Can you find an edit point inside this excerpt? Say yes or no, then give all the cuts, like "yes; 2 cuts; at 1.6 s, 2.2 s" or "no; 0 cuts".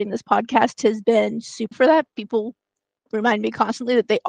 yes; 2 cuts; at 1.7 s, 2.1 s